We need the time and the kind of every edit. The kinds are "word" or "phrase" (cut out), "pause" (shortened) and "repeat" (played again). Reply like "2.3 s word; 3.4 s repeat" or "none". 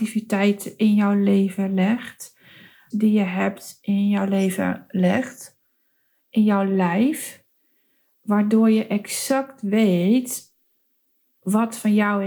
2.9 s phrase